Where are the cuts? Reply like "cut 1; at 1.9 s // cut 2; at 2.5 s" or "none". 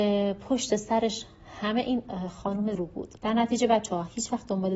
cut 1; at 2.7 s // cut 2; at 3.2 s